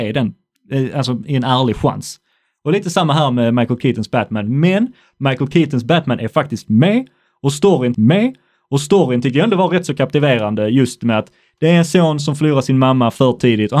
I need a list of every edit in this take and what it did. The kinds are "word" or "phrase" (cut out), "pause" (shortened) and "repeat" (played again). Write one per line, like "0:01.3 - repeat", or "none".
0:07.9 - repeat